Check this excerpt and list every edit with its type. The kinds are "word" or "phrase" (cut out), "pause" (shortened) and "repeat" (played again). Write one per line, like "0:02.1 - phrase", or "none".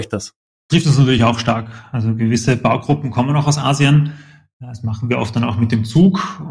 none